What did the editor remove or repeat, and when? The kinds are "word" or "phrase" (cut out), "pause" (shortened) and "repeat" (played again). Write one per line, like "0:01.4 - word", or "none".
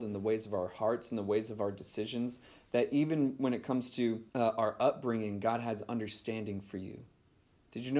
0:04.3 - pause

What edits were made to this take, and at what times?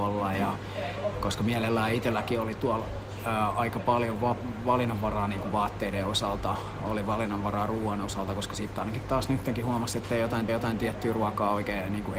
0:10.5 - repeat

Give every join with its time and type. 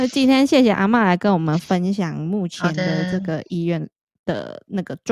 none

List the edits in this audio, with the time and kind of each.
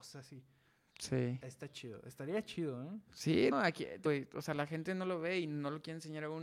0:03.5 - word
0:04.1 - word

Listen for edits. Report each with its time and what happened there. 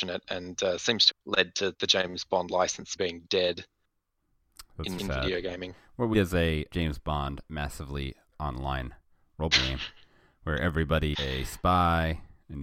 0:01.1 - word
0:01.7 - word
0:03.0 - word
0:05.0 - word
0:06.1 - word
0:06.7 - word
0:08.3 - word
0:09.5 - word
0:11.1 - word

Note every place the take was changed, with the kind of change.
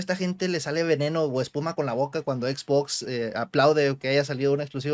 none

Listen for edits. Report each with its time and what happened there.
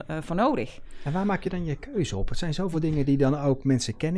none

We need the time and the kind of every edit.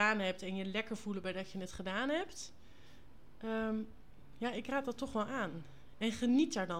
none

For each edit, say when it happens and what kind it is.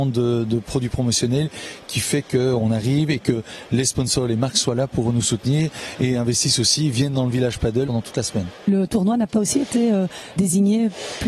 none

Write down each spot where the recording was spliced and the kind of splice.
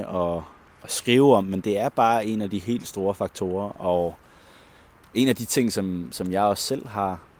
0:01.6 - word

